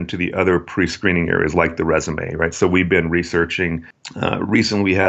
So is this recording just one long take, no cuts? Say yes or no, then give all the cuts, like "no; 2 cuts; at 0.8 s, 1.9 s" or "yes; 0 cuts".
yes; 0 cuts